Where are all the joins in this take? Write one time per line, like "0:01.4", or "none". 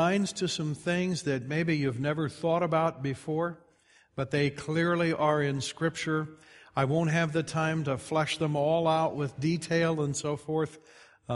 none

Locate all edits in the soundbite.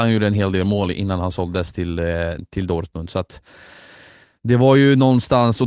none

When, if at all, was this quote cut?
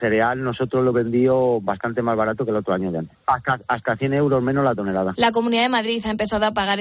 0:00.9

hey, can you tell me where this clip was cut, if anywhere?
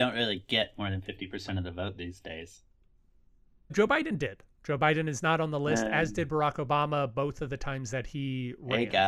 0:03.7

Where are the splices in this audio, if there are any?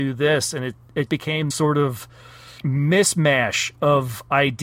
0:01.1
0:01.5
0:02.6

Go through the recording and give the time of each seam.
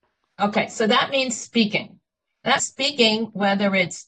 0:02.6

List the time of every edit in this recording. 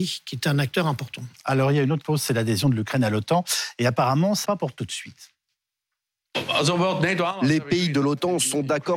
0:02.0
0:04.4

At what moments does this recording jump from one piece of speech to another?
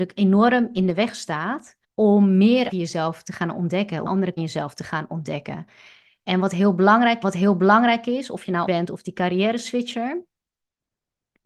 0:01.8
0:02.7
0:04.1
0:04.4
0:07.2
0:08.7

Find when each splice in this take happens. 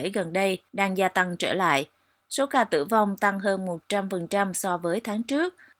none

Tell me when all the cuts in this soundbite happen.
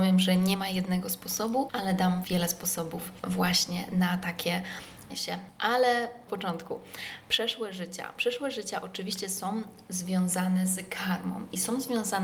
0:02.2
0:05.1
0:06.3

